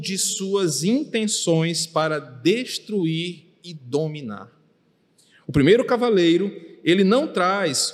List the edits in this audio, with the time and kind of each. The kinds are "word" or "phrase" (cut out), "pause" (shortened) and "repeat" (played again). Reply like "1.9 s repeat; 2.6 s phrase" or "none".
none